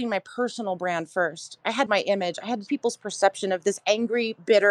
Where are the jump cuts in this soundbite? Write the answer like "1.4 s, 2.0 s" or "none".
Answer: 1.9 s, 2.7 s